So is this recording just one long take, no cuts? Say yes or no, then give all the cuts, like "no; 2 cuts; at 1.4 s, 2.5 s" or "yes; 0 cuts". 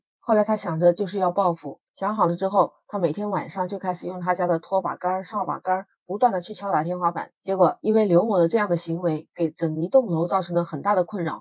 no; 1 cut; at 1.9 s